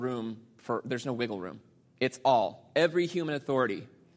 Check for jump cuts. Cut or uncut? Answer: uncut